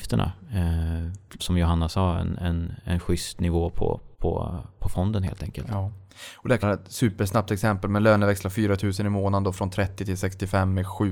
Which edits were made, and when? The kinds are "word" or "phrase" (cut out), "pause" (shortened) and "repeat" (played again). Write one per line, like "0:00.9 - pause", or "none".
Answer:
0:01.4 - word
0:04.1 - pause
0:06.6 - phrase